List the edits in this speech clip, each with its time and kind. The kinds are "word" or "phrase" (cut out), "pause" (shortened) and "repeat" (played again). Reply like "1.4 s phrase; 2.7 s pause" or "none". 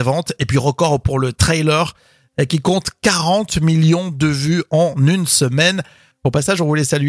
none

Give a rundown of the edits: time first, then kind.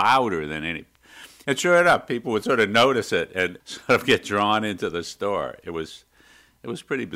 none

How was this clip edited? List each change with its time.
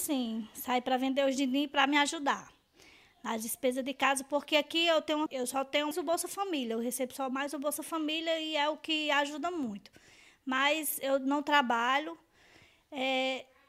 5.3 s word; 5.9 s word

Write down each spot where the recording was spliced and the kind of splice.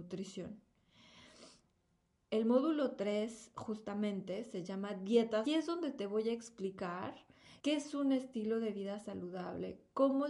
5.5 s phrase; 7.6 s pause

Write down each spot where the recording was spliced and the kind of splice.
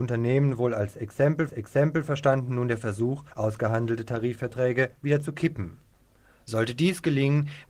1.5 s repeat; 3.3 s pause

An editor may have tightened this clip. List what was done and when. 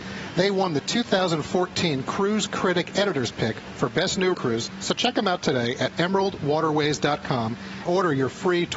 4.3 s word; 7.9 s word

